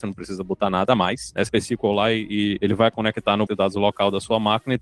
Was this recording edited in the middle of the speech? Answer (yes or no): yes